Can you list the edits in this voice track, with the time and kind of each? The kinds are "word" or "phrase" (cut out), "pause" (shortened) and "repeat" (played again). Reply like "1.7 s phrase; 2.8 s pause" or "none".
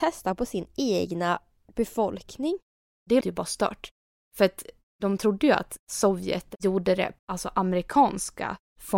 3.2 s word; 7.2 s phrase